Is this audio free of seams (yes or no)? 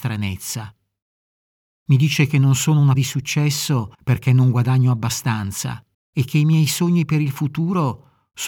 no